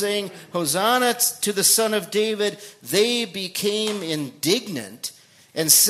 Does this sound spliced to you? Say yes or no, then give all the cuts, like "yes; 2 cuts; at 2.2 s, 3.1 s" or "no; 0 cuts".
no; 0 cuts